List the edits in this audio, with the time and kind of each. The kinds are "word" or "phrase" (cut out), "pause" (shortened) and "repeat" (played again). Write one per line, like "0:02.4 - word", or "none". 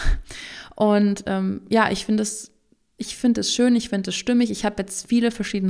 none